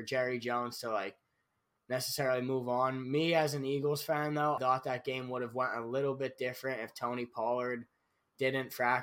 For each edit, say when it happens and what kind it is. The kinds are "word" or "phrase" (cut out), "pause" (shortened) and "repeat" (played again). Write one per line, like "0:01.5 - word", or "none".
0:04.6 - word